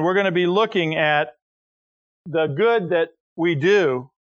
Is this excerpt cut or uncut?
uncut